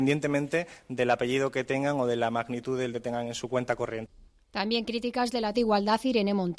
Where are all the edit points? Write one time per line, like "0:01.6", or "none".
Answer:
0:02.9
0:05.5

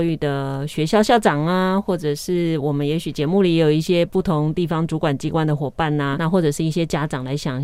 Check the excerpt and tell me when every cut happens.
0:06.2

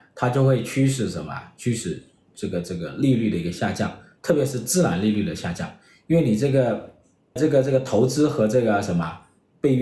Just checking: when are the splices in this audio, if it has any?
0:07.4

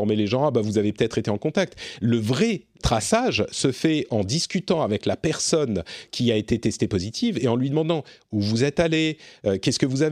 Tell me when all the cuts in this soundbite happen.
0:02.8

